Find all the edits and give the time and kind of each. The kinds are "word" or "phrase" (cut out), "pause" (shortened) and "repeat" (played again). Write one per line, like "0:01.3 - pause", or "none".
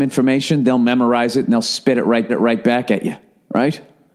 0:02.3 - repeat